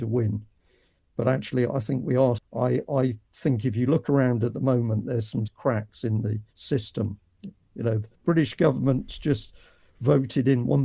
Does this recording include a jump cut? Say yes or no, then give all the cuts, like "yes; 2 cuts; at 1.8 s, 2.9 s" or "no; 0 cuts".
yes; 4 cuts; at 2.4 s, 5.5 s, 6.5 s, 8.1 s